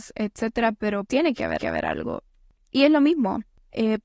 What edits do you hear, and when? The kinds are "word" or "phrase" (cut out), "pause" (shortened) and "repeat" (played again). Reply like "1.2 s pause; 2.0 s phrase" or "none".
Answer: 1.1 s word; 1.6 s repeat